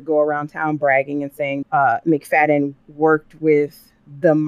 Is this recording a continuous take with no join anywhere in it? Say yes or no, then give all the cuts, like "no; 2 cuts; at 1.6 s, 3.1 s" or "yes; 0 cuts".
no; 2 cuts; at 1.6 s, 2.8 s